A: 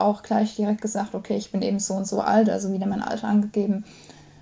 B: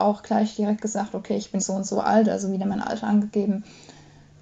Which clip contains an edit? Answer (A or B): B